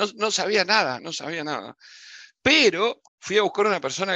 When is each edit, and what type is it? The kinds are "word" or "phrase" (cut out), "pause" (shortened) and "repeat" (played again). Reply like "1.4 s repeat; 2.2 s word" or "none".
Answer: 3.1 s pause